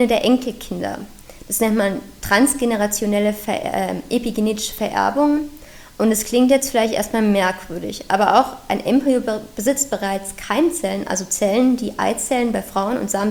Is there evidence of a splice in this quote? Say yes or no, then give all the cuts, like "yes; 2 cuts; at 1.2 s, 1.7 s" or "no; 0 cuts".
no; 0 cuts